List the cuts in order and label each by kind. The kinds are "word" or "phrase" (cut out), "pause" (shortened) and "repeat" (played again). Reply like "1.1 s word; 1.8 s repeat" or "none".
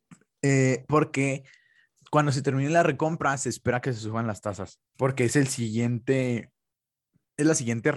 4.9 s pause